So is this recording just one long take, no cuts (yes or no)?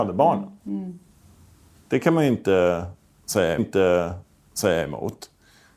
no